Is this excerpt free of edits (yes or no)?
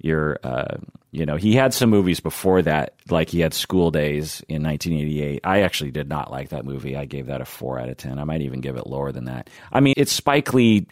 no